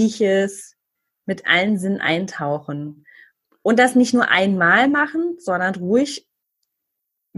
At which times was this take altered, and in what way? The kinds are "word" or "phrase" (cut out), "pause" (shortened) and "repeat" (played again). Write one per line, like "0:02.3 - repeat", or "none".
none